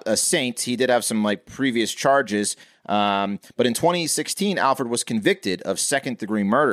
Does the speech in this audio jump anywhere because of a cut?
no; 0 cuts

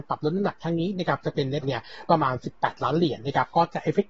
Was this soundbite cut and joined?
yes; 1 cut; at 1.6 s

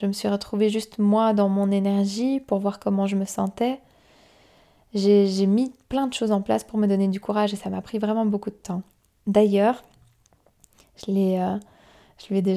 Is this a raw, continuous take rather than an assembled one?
yes; 0 cuts

